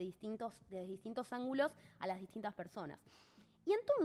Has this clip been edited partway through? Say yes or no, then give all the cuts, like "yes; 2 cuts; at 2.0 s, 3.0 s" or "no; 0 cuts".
no; 0 cuts